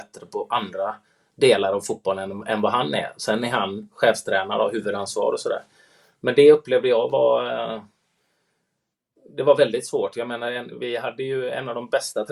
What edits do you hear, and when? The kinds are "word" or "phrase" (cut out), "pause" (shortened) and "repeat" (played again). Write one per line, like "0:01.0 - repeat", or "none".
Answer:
none